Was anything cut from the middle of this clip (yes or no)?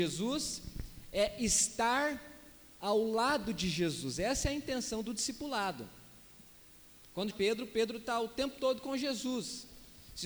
yes